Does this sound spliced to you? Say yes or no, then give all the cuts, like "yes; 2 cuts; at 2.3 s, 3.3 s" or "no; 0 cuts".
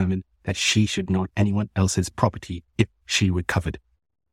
yes; 2 cuts; at 1.3 s, 2.7 s